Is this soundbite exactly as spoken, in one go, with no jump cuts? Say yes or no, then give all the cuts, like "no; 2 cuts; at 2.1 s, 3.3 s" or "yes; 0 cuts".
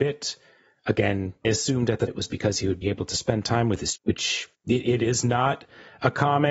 no; 5 cuts; at 1.4 s, 2.1 s, 2.8 s, 4.0 s, 4.5 s